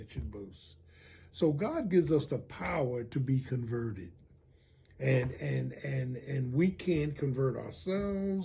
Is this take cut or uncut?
uncut